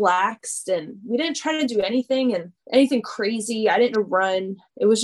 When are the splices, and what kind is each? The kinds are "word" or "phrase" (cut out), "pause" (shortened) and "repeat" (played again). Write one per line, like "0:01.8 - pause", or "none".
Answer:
0:02.6 - pause
0:03.9 - word